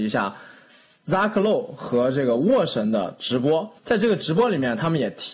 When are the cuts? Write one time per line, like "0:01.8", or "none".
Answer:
0:03.8